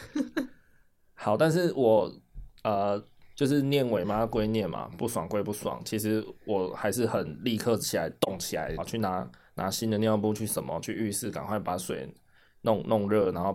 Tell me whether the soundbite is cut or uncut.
cut